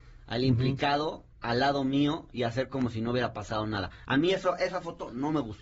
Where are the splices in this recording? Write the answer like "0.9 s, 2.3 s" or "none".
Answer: 1.3 s